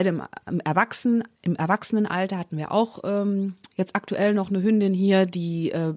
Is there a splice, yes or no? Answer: yes